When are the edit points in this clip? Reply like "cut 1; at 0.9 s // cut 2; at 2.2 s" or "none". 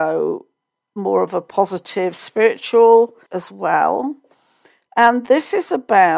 cut 1; at 3.3 s